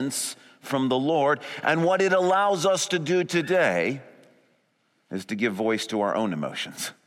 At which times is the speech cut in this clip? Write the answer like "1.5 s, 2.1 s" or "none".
none